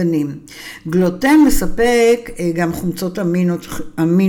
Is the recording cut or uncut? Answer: uncut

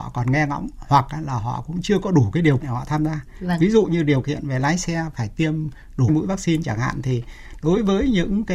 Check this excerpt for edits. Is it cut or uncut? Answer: cut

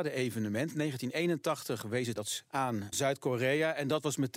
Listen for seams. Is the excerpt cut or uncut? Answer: cut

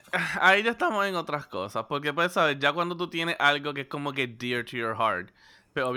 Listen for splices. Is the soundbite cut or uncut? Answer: uncut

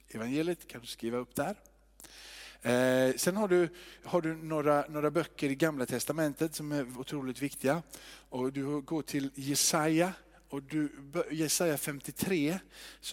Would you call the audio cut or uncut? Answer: uncut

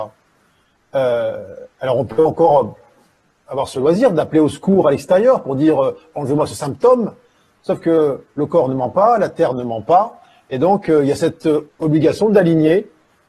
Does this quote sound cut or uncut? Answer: uncut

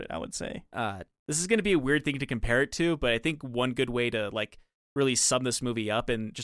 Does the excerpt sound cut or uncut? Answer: uncut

